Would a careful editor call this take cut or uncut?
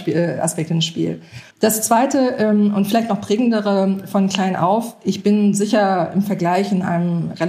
cut